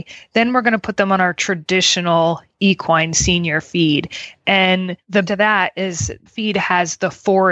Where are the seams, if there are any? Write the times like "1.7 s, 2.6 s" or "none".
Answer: 5.2 s, 6.3 s